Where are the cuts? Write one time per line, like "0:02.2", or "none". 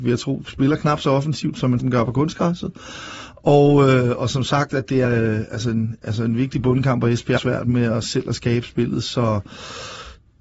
0:01.8
0:05.0
0:07.4